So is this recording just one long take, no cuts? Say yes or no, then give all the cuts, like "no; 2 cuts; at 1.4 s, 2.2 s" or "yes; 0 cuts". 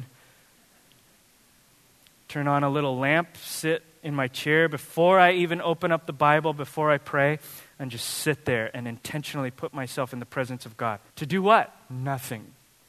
no; 2 cuts; at 8.7 s, 11.1 s